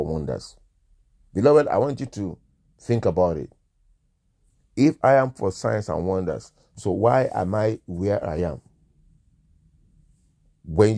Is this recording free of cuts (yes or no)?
yes